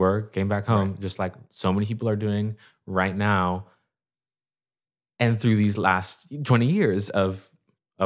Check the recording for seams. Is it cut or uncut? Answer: uncut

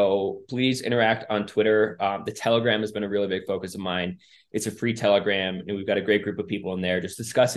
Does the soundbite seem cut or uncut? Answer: uncut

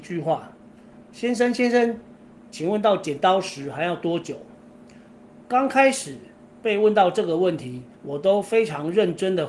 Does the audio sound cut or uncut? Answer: cut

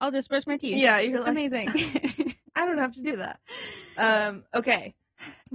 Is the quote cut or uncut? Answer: cut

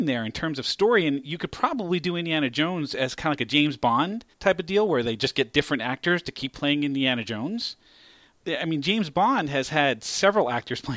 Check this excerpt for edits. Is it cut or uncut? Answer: cut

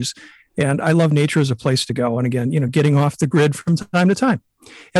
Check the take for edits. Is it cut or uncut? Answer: uncut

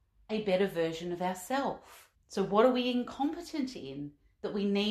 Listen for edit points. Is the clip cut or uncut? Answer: cut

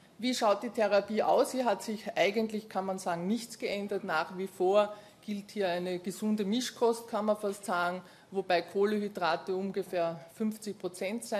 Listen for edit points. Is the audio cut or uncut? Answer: uncut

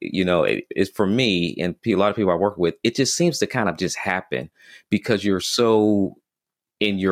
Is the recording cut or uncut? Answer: uncut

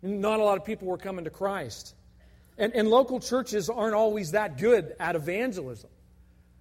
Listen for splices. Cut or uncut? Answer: uncut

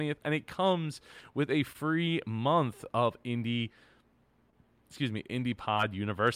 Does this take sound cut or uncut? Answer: uncut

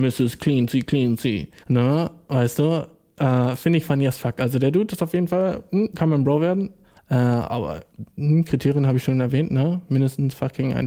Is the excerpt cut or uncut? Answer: cut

